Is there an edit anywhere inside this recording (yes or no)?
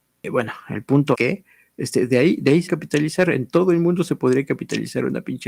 yes